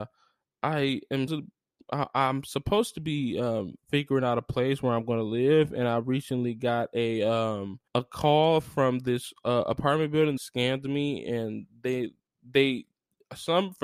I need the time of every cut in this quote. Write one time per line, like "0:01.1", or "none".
0:01.3
0:07.9
0:10.4